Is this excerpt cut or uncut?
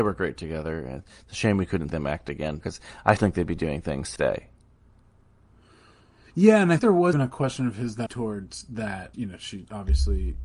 cut